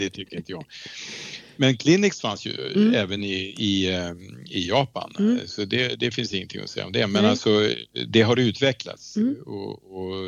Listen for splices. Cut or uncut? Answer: uncut